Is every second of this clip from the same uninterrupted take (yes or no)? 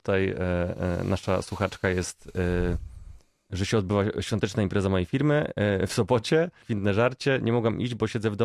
no